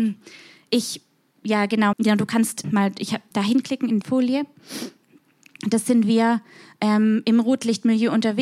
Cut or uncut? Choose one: cut